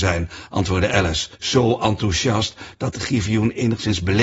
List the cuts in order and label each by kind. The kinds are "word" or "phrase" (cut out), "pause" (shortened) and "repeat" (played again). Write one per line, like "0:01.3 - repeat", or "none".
0:01.3 - pause